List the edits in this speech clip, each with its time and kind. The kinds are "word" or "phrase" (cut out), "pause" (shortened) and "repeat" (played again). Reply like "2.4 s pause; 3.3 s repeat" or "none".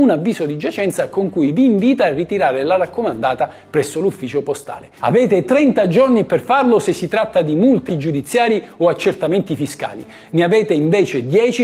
7.9 s word